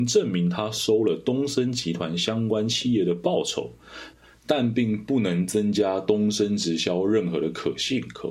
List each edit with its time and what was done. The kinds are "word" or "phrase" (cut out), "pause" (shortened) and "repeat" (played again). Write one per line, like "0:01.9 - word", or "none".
none